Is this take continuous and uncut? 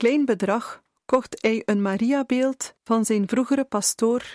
no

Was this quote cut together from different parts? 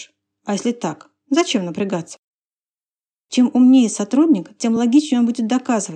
no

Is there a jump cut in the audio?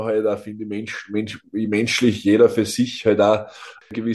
no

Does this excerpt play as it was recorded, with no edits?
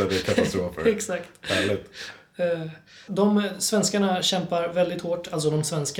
no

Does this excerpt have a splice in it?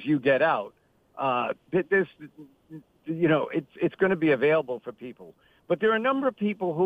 no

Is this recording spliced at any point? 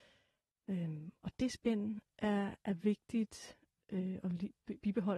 no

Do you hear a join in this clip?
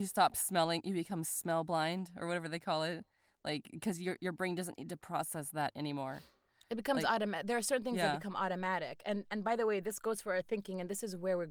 no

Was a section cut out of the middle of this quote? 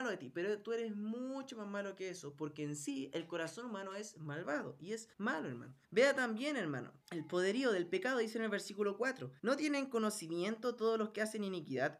yes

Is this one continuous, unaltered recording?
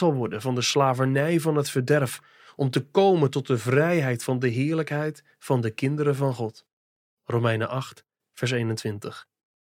yes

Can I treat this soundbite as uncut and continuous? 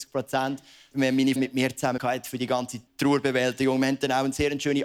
no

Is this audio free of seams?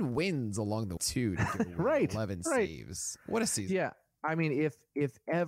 no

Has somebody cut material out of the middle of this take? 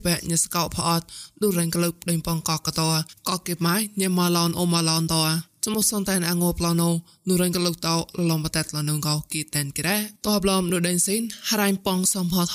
yes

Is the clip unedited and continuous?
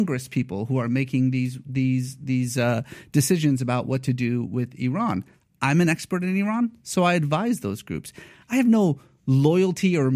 yes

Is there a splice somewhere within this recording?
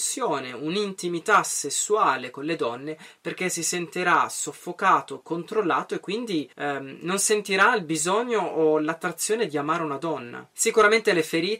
yes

